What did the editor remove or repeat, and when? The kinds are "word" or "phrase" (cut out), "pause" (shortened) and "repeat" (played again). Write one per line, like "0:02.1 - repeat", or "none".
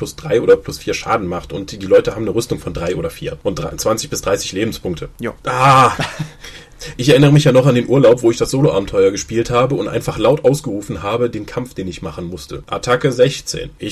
0:07.0 - word